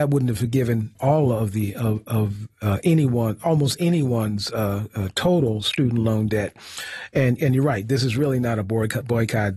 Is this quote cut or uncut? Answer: cut